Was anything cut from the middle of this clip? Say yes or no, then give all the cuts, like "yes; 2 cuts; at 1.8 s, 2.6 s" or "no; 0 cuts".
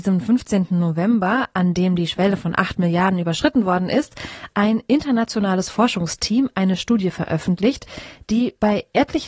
no; 0 cuts